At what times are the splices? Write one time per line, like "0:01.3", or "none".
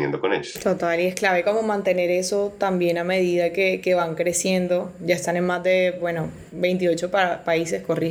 none